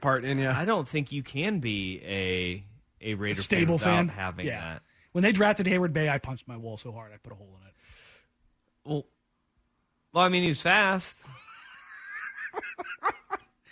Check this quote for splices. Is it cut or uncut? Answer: uncut